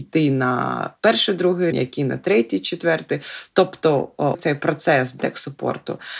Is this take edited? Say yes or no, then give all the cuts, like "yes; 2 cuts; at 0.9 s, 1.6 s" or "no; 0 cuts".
yes; 2 cuts; at 1.7 s, 4.3 s